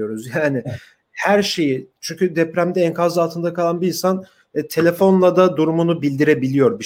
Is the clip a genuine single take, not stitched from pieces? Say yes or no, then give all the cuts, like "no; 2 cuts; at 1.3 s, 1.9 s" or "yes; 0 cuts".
yes; 0 cuts